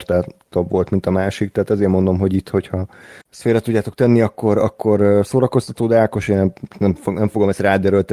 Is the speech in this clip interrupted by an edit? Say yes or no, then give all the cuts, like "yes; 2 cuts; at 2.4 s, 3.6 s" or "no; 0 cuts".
yes; 1 cut; at 3.2 s